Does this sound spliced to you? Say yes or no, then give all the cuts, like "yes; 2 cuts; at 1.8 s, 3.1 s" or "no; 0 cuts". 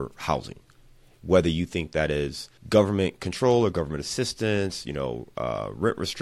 yes; 1 cut; at 2.6 s